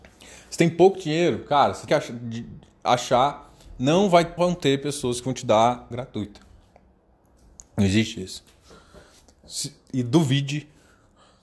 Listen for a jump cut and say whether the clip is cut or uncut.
cut